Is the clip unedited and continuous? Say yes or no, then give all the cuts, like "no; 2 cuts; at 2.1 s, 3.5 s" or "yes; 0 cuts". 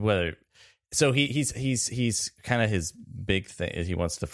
yes; 0 cuts